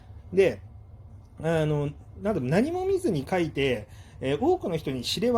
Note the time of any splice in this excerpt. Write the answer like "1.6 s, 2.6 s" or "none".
none